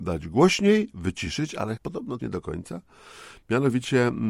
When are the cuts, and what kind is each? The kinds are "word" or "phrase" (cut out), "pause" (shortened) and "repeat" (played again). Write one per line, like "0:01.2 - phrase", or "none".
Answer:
0:00.9 - word
0:01.8 - word
0:02.2 - word